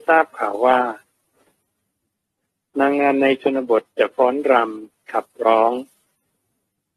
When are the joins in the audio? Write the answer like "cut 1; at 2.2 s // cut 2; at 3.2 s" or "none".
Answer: none